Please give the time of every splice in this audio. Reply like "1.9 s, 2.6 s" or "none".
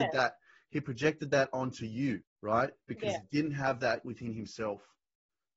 2.2 s

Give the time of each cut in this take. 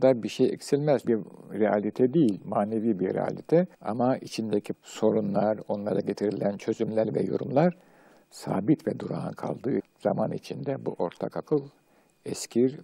1.0 s, 3.7 s, 4.7 s, 9.8 s

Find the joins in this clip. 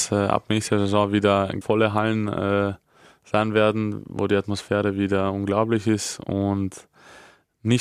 1.6 s

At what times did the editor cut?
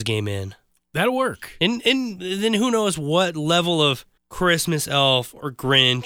4.2 s

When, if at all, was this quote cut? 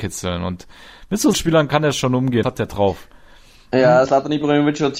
1.3 s, 2.4 s, 4.0 s

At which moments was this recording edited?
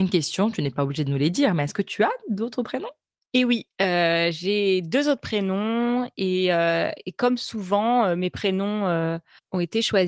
none

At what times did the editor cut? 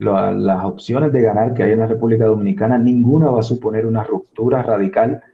none

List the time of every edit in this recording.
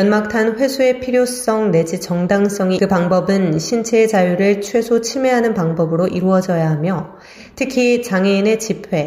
2.8 s

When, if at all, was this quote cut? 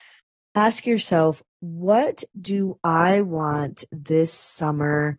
none

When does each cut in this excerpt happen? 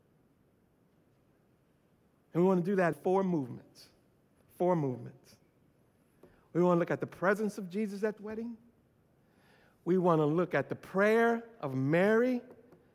2.9 s, 8.2 s

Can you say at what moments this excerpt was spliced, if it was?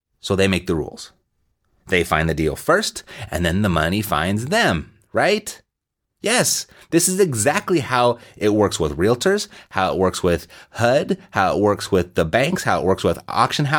none

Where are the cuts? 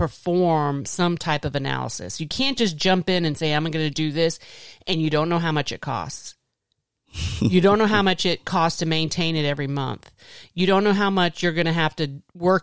none

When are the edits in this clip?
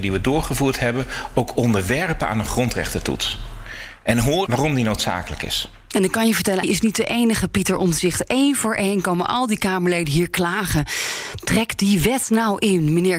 4.5 s, 6.6 s

